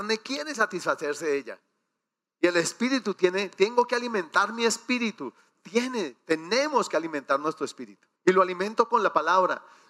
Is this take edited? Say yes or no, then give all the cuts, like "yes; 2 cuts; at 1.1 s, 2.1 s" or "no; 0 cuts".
yes; 1 cut; at 8.1 s